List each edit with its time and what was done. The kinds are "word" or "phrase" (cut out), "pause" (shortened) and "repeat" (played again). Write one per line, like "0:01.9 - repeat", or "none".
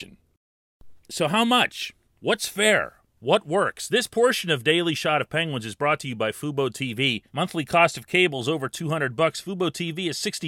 0:01.0 - pause
0:02.0 - pause
0:03.2 - pause
0:07.3 - pause